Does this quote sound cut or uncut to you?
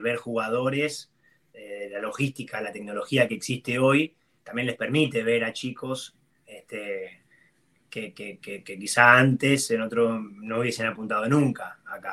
uncut